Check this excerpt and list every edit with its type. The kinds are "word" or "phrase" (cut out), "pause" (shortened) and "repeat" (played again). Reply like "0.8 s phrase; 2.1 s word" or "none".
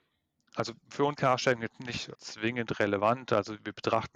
1.2 s word; 2.1 s word